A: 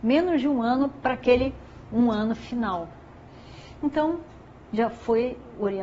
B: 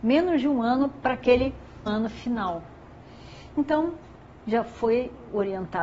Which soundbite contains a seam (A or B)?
B